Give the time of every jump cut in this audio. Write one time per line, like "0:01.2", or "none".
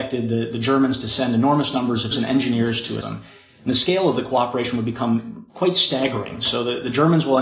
0:02.1
0:03.0
0:05.5